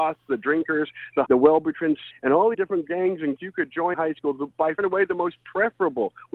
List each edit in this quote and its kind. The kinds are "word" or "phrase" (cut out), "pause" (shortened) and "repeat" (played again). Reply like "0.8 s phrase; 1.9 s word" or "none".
1.3 s word; 2.1 s word; 2.5 s word; 3.4 s word; 3.9 s word; 4.8 s word